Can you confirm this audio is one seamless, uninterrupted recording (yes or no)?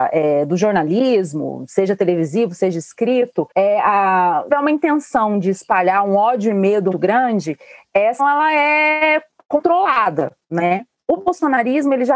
no